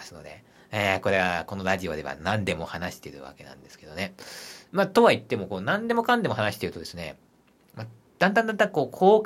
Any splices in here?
no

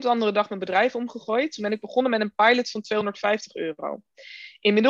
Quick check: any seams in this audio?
no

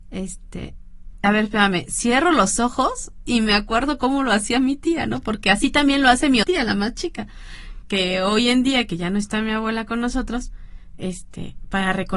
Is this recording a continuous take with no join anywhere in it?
no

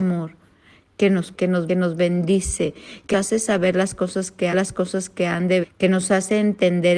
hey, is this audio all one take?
no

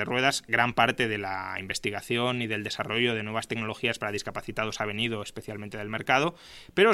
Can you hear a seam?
no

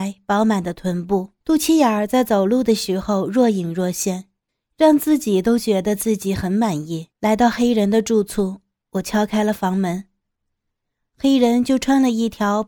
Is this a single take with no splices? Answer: no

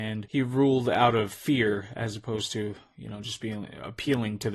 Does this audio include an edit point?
no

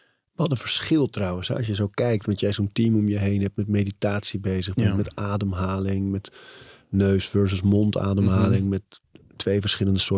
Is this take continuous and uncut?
yes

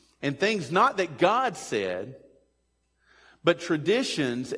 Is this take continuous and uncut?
yes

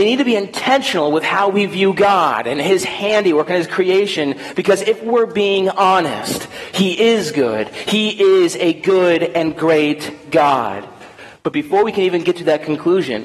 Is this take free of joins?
yes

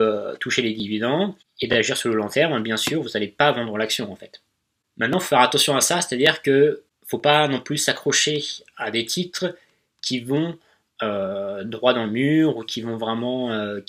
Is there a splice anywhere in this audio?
no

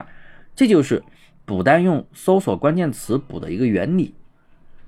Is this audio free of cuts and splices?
yes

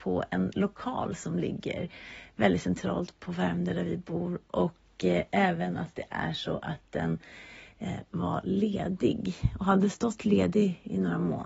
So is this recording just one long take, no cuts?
yes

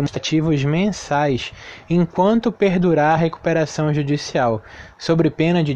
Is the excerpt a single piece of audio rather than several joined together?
yes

